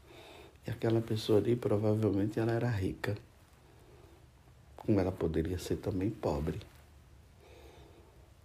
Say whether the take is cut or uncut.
uncut